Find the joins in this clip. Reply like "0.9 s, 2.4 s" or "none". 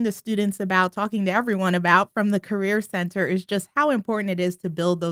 none